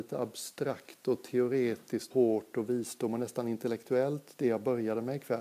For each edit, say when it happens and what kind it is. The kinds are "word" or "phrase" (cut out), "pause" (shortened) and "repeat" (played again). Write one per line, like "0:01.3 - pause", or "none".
0:02.1 - word